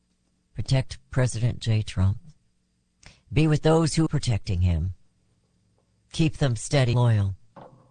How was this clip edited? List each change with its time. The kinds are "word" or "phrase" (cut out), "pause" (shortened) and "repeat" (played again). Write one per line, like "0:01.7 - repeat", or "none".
0:01.6 - word
0:04.1 - word
0:06.9 - word